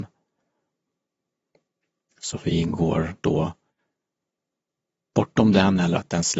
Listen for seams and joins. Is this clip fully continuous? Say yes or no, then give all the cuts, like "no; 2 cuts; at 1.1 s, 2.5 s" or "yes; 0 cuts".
yes; 0 cuts